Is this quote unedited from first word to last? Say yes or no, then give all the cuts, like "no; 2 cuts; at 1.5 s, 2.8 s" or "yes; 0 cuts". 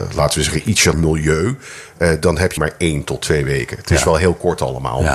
no; 2 cuts; at 0.9 s, 2.6 s